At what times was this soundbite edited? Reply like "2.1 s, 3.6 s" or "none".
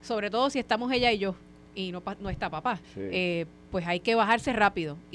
2.8 s